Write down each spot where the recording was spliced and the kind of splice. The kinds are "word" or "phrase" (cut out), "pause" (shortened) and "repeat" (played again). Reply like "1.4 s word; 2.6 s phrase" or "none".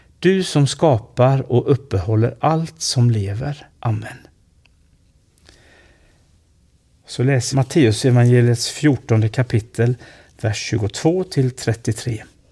3.7 s pause; 7.5 s phrase